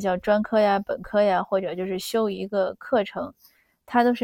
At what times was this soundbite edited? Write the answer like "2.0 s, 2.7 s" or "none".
none